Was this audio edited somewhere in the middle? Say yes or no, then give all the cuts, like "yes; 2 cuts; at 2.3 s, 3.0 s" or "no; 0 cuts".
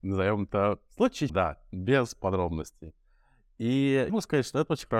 yes; 2 cuts; at 1.3 s, 4.1 s